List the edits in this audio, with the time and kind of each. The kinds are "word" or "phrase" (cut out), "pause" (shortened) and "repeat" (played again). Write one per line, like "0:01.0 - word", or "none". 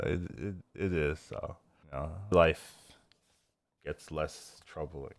0:01.8 - word
0:02.3 - word